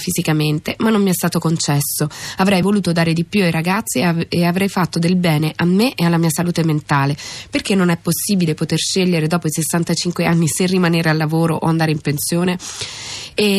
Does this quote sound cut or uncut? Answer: uncut